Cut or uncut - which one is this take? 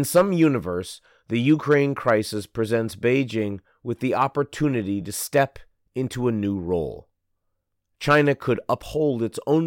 uncut